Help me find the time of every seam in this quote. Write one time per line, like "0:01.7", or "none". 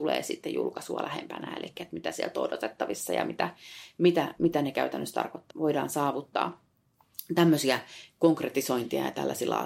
0:05.5